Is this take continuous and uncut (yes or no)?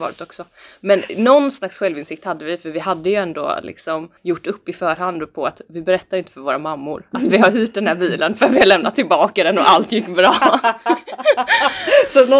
no